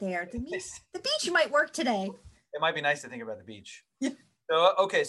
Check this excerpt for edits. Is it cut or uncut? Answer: uncut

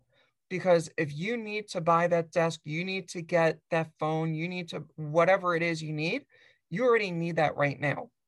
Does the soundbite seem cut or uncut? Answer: uncut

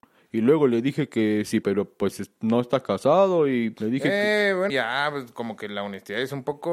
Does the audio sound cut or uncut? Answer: cut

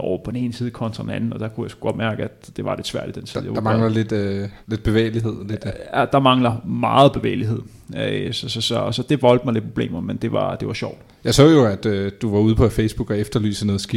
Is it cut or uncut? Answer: cut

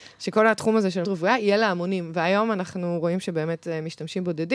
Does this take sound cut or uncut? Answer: cut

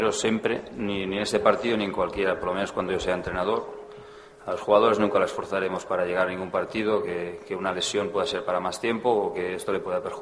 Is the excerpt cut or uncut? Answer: uncut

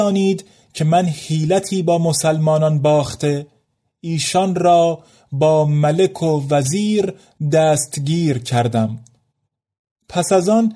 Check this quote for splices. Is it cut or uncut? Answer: uncut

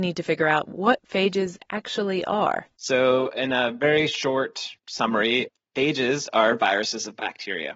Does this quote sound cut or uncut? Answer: cut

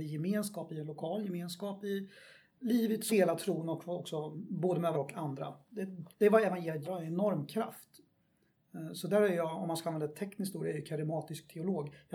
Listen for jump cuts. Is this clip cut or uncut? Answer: cut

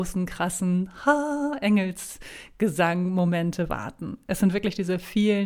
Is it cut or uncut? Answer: uncut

